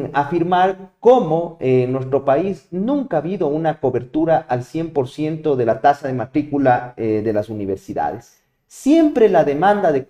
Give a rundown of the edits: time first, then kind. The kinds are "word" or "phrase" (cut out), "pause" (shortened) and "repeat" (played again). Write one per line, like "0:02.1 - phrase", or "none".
none